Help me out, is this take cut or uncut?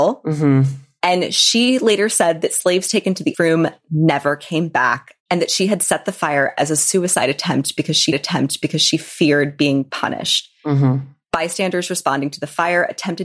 cut